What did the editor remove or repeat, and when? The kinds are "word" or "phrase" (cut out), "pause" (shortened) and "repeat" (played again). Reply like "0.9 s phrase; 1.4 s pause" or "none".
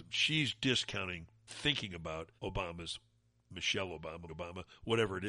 1.5 s phrase; 2.4 s pause; 4.3 s word